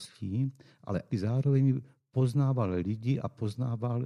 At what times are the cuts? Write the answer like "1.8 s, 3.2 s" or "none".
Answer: 1.1 s